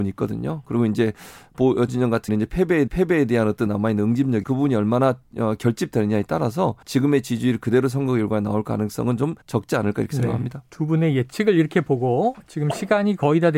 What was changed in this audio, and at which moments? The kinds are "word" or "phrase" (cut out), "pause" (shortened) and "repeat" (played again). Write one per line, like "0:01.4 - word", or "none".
0:01.9 - word
0:02.3 - word
0:02.9 - repeat
0:03.7 - word
0:04.4 - word
0:06.8 - pause
0:09.4 - pause